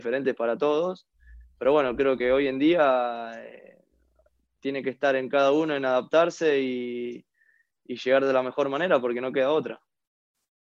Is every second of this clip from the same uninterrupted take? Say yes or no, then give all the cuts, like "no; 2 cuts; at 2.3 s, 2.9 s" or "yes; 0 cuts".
yes; 0 cuts